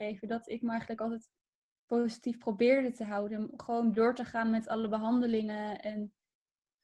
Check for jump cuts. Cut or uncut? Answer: uncut